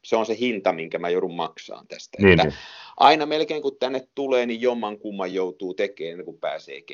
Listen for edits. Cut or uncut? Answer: uncut